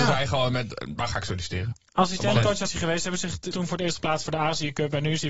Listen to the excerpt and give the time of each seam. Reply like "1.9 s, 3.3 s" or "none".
2.7 s, 3.5 s